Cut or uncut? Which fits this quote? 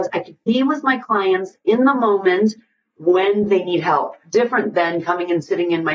uncut